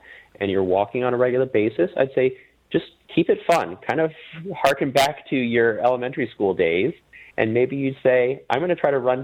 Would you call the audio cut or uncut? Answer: uncut